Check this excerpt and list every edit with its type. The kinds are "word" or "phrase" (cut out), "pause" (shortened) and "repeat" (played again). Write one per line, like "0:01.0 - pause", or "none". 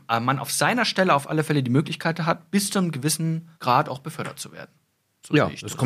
0:03.5 - pause